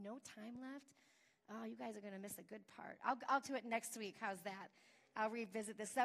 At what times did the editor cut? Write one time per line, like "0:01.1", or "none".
0:03.4